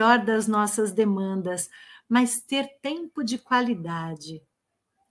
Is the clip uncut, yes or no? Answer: yes